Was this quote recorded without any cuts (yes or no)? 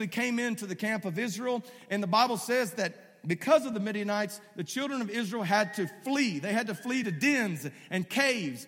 yes